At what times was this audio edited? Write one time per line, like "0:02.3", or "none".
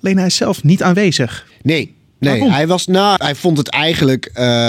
0:03.2